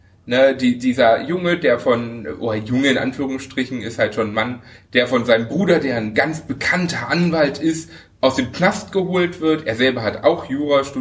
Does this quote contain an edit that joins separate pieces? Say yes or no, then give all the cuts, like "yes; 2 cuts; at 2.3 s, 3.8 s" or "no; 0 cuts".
no; 0 cuts